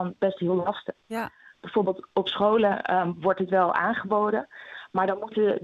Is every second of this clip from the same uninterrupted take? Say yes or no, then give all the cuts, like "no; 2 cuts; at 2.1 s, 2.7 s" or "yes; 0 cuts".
yes; 0 cuts